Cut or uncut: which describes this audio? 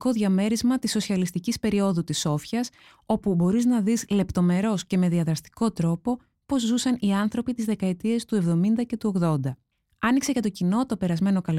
uncut